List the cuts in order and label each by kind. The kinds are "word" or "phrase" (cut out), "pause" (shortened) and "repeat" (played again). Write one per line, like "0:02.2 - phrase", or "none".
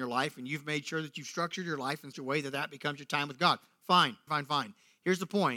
0:02.1 - word
0:04.3 - word